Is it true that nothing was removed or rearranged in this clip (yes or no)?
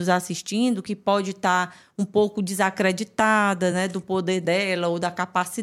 yes